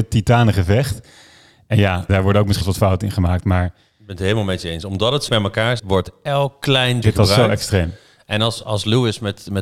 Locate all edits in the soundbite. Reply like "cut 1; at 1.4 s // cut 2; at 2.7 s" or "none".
cut 1; at 2.1 s // cut 2; at 2.6 s // cut 3; at 5.3 s // cut 4; at 5.8 s // cut 5; at 7.0 s // cut 6; at 8.6 s